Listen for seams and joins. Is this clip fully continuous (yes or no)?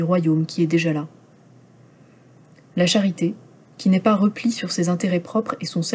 yes